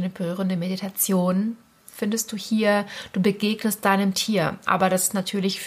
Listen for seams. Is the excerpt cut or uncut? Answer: uncut